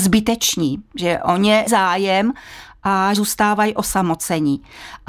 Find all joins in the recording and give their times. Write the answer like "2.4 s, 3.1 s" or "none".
1.7 s, 3.2 s